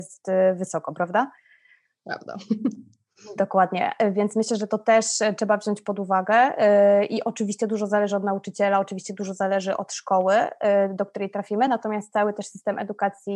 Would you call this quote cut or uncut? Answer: uncut